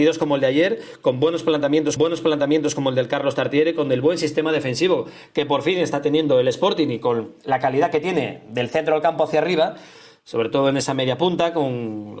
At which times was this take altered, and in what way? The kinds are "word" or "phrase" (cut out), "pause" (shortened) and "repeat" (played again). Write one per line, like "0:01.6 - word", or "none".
0:02.0 - repeat